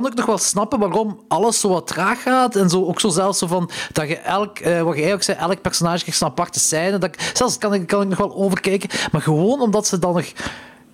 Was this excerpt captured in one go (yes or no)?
no